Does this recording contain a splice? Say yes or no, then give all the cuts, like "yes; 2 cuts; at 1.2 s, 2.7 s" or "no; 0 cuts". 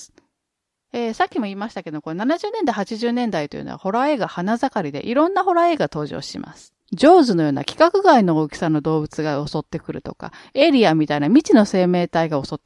yes; 1 cut; at 6.8 s